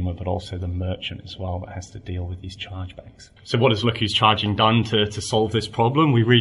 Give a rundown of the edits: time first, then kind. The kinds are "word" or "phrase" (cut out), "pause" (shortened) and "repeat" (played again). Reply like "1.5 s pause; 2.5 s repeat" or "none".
3.4 s pause